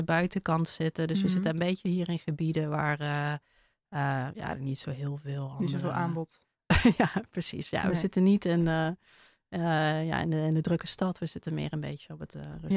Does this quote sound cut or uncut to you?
uncut